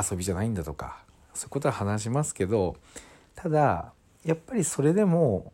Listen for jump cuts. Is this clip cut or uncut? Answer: uncut